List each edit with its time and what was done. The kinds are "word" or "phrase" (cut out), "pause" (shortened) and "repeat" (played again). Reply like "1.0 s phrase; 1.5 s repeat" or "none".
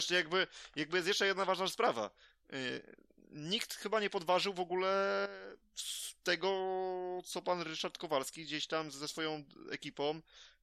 none